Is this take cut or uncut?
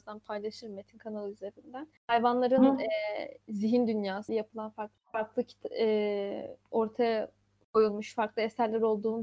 cut